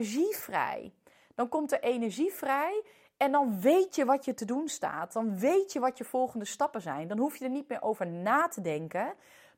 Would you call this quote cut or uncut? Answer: uncut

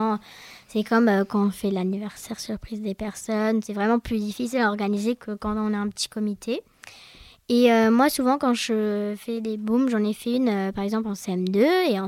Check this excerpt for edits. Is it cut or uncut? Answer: uncut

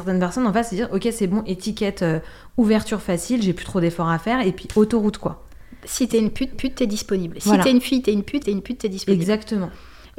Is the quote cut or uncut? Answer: cut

